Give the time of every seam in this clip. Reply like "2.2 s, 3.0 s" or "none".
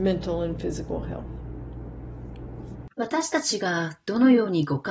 2.9 s